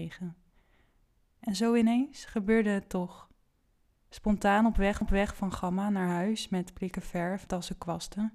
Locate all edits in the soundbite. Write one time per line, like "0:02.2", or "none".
0:05.0
0:07.5